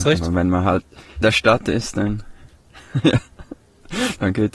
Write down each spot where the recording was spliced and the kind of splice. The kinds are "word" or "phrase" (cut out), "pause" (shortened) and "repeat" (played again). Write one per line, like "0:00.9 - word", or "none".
0:01.2 - word